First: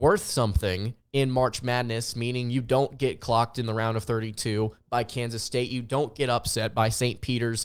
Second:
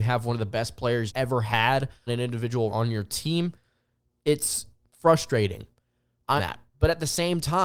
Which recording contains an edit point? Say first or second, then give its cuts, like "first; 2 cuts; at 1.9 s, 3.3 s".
second; 4 cuts; at 1.1 s, 2.1 s, 2.7 s, 6.4 s